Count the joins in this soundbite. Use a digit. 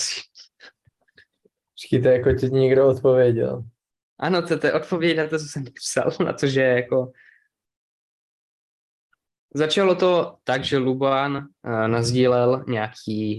0